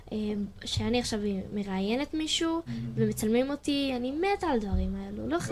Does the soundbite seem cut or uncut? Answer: uncut